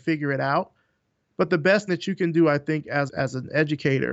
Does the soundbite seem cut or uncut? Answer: cut